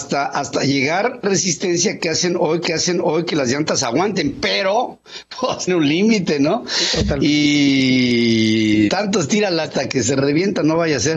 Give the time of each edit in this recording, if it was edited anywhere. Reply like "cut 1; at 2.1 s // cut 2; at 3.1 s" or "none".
cut 1; at 1.2 s // cut 2; at 2.7 s // cut 3; at 5.7 s // cut 4; at 8.9 s // cut 5; at 9.7 s